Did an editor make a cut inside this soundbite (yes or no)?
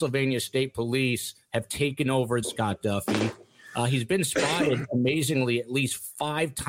yes